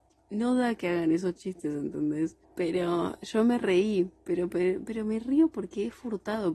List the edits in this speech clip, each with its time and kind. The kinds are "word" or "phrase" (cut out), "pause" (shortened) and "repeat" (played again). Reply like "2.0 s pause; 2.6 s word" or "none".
2.4 s pause

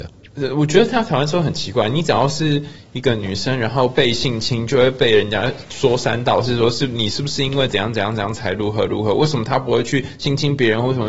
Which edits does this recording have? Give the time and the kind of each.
none

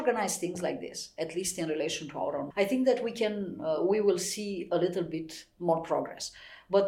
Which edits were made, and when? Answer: 2.5 s word

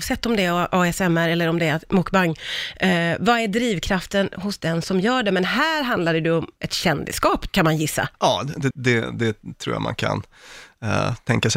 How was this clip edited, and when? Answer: 7.5 s word; 8.1 s pause; 8.7 s word

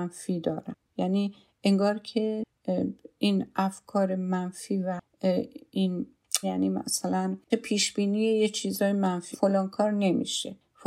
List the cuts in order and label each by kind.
6.4 s word; 7.5 s word; 9.3 s word

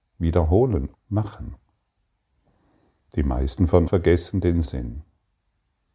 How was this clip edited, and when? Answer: 0.9 s word; 3.9 s word; 4.6 s word

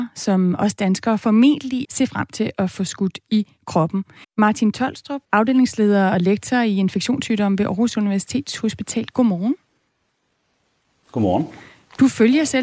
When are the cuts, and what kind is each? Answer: 1.8 s phrase; 4.2 s pause; 5.2 s pause

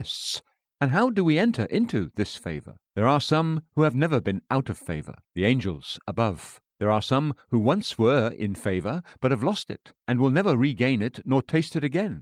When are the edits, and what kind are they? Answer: 2.9 s pause; 5.2 s pause; 6.7 s pause; 10.0 s pause

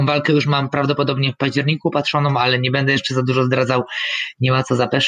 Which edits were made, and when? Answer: none

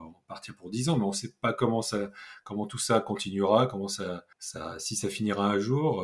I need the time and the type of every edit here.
4.3 s pause

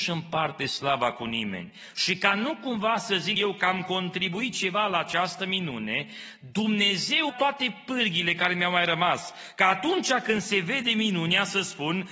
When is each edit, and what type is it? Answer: 3.4 s word; 7.3 s word

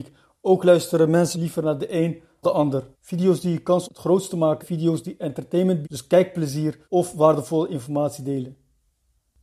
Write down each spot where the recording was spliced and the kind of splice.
1.3 s word; 2.4 s word; 2.9 s pause; 3.8 s phrase; 4.6 s word; 5.8 s word; 6.8 s pause

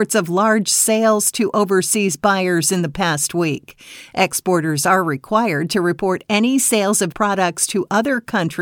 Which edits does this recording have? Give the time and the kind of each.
7.1 s word

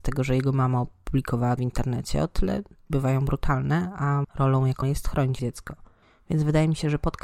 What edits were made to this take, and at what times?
1.6 s word; 2.9 s word; 4.2 s word; 4.8 s word; 5.4 s word

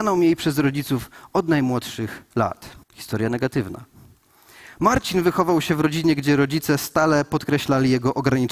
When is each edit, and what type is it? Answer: 2.8 s pause

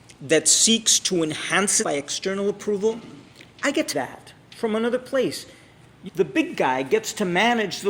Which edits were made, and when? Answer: 1.8 s word; 3.5 s pause; 3.9 s word; 6.1 s word

